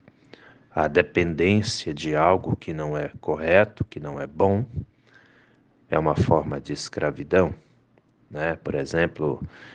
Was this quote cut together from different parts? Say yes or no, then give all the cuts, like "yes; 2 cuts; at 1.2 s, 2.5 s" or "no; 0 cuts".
no; 0 cuts